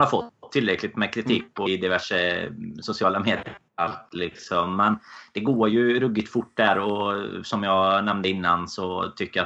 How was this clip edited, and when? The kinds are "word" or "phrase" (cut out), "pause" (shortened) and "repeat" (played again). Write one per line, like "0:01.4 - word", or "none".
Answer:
0:01.7 - word
0:03.7 - pause

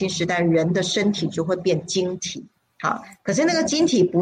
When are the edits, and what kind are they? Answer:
0:02.6 - pause

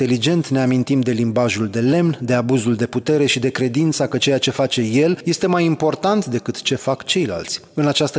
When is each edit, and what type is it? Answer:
none

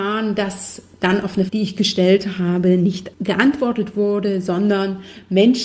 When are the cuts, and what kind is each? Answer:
0:01.5 - word
0:03.1 - pause

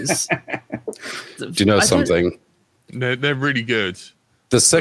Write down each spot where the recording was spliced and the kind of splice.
none

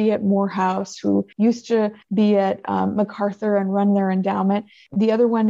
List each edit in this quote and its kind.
0:01.3 - pause
0:02.0 - pause

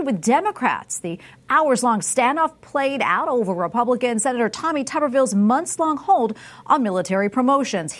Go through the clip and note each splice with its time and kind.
none

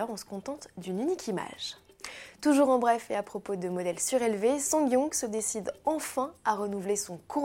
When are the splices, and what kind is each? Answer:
none

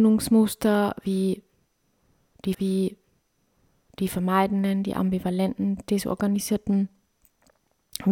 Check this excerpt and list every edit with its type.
0:02.5 - repeat

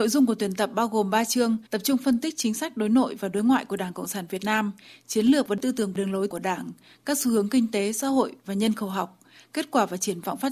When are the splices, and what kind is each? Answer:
0:01.7 - pause

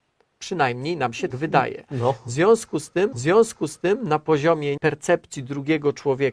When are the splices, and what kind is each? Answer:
0:01.3 - word
0:03.1 - repeat
0:04.8 - word

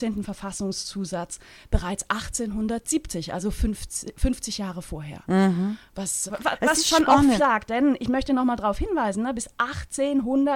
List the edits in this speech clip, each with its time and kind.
0:06.3 - word
0:07.4 - phrase

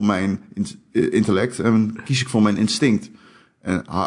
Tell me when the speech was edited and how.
none

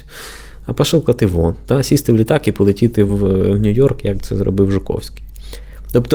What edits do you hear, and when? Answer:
none

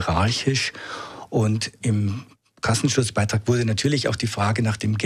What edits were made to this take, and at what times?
0:01.8 - word

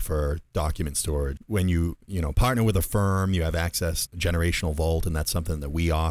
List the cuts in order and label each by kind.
0:01.4 - word
0:04.1 - word

